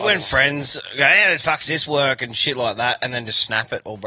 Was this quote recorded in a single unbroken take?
yes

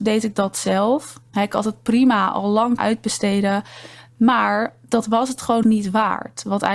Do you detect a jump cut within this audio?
yes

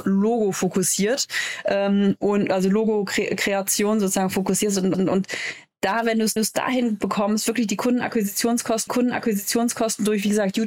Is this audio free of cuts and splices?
no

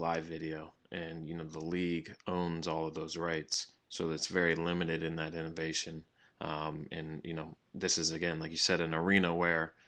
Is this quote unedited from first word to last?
yes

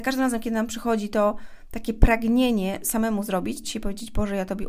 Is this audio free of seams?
no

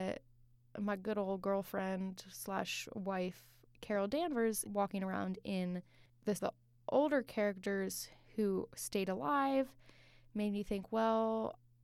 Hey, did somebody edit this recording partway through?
yes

